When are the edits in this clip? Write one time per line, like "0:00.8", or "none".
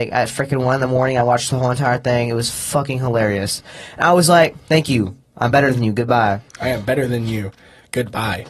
none